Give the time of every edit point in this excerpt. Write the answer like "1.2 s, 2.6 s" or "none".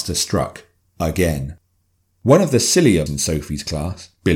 3.1 s